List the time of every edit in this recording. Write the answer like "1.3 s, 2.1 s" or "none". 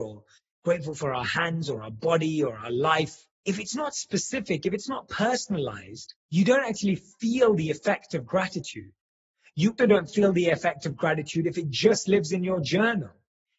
3.4 s, 6.2 s, 9.8 s